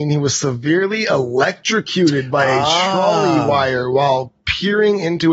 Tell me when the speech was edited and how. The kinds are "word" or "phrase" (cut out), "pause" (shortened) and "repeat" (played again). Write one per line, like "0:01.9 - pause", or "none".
none

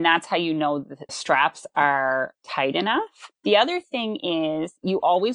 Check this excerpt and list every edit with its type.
0:01.1 - word
0:02.4 - word
0:03.4 - pause

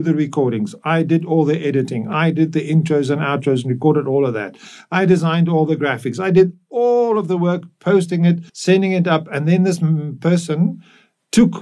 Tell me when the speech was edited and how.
0:08.5 - pause

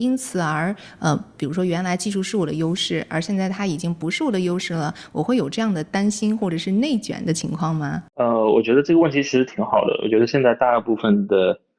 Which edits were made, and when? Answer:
0:08.1 - pause

